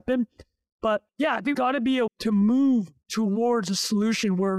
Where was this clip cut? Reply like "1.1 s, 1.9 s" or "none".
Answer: 1.1 s, 1.5 s, 2.1 s, 3.0 s